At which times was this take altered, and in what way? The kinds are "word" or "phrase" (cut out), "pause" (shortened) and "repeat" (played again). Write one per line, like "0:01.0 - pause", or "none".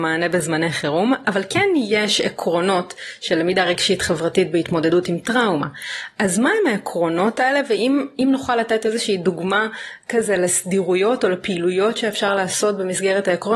0:01.2 - word